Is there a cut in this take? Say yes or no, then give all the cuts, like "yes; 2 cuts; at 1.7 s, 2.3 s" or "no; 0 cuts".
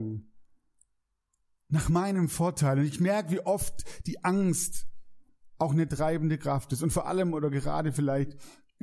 no; 0 cuts